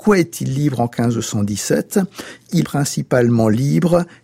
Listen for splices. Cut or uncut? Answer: cut